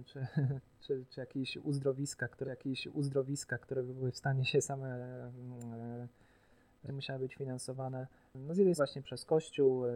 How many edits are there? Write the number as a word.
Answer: four